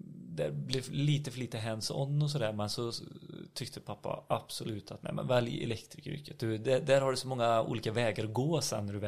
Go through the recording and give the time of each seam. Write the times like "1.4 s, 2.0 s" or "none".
none